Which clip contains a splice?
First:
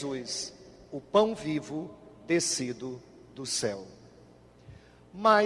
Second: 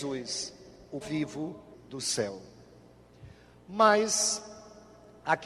second; 2 cuts; at 1.0 s, 1.7 s

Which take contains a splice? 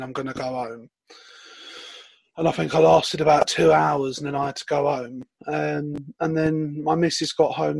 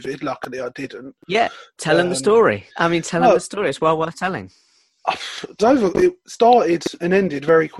second; 2 cuts; at 2.7 s, 5.6 s

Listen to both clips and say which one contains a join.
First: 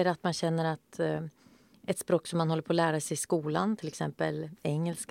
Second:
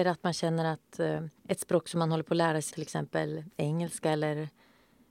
second; 2 cuts; at 1.4 s, 2.7 s

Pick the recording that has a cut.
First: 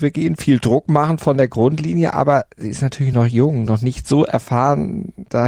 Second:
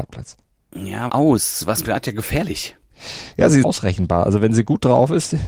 second; 3 cuts; at 1.1 s, 1.8 s, 3.6 s

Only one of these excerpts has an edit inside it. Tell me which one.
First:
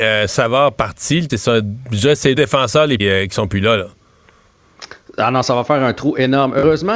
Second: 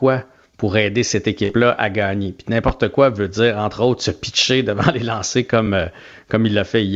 first; 3 cuts; at 1.3 s, 2.4 s, 3.0 s

